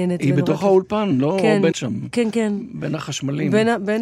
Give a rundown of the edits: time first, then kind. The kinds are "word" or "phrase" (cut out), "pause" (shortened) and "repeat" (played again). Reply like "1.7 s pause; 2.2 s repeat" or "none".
1.7 s word